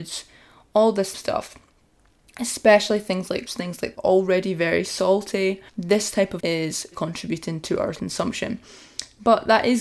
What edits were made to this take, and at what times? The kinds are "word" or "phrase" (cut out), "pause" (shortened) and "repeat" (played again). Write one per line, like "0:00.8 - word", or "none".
0:01.1 - phrase
0:03.5 - word
0:03.9 - phrase
0:05.7 - pause
0:06.4 - word
0:06.9 - word
0:07.9 - word